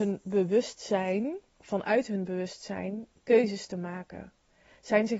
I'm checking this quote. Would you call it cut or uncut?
cut